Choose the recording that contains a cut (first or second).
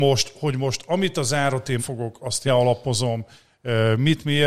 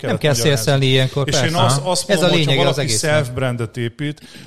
first